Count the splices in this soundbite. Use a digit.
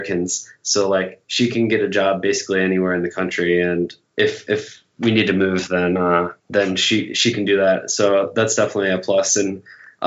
3